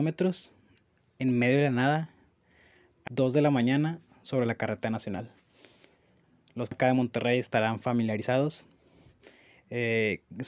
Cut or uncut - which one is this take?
cut